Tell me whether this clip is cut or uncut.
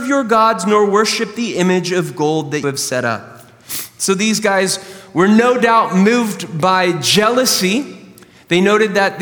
cut